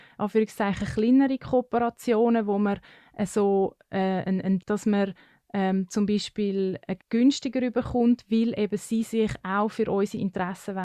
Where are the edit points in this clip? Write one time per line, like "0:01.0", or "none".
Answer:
0:04.6
0:07.0